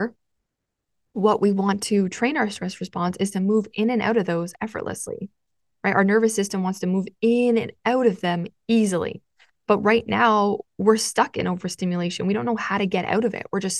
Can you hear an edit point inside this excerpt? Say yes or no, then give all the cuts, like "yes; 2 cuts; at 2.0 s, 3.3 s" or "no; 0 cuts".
no; 0 cuts